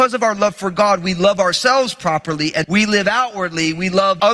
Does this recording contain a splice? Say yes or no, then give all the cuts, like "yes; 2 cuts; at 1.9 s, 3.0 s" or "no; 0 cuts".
yes; 1 cut; at 2.6 s